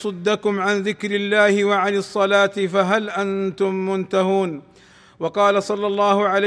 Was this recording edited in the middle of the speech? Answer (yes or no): no